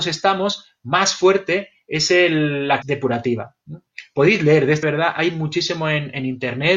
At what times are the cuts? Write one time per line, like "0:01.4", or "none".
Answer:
0:02.8
0:03.6
0:04.8